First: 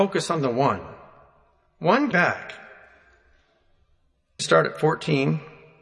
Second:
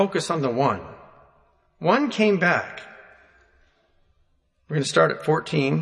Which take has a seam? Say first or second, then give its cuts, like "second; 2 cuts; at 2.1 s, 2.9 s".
first; 2 cuts; at 2.1 s, 4.4 s